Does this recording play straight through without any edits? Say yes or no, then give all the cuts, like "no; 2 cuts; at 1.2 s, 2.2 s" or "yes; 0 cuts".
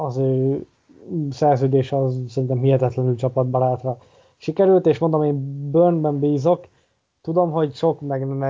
yes; 0 cuts